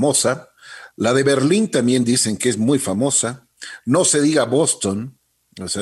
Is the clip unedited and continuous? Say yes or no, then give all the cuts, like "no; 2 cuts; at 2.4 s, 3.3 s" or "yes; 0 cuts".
yes; 0 cuts